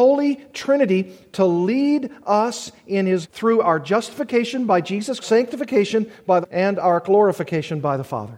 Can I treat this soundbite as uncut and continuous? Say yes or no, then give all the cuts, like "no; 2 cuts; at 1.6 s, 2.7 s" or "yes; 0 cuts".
no; 3 cuts; at 3.2 s, 5.2 s, 6.4 s